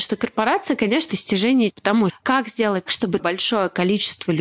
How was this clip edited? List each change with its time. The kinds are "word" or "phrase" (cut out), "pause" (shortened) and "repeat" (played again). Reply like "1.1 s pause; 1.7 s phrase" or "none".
1.1 s word; 1.7 s word; 2.1 s word; 2.9 s word; 3.2 s word